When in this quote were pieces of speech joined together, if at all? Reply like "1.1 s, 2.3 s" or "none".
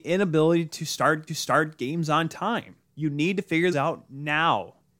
1.3 s, 2.8 s, 3.7 s